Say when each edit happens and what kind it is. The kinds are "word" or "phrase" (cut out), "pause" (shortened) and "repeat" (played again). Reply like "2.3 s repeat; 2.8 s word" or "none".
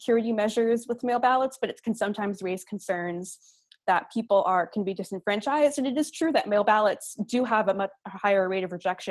none